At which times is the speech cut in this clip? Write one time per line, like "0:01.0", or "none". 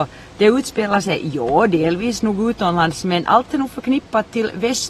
none